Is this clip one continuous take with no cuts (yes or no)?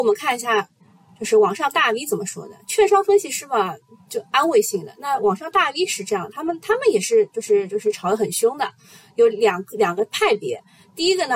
yes